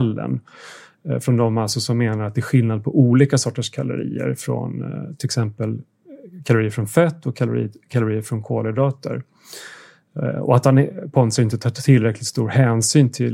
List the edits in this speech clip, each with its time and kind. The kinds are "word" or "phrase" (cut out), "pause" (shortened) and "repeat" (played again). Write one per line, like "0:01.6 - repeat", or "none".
none